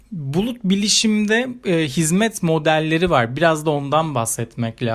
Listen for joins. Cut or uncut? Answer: uncut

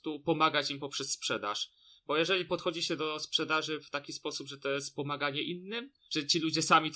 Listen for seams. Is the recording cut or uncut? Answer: uncut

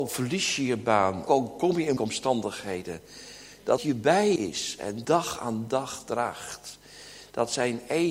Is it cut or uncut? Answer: cut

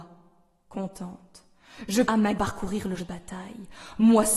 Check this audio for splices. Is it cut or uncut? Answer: cut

